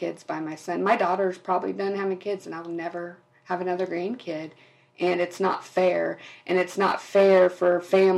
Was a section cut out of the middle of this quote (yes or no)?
no